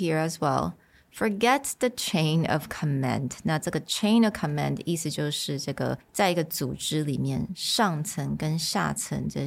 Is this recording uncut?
yes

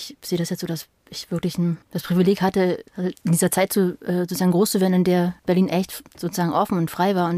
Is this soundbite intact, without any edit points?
no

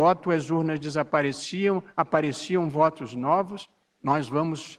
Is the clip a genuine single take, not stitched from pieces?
yes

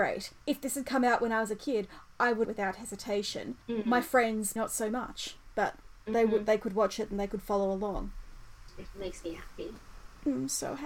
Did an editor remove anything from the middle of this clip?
yes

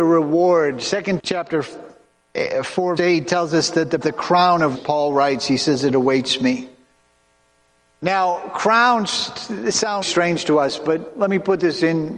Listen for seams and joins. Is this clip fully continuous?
no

